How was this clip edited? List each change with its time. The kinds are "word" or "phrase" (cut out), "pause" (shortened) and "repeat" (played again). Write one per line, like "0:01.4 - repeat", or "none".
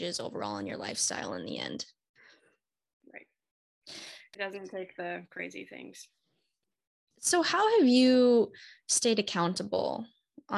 none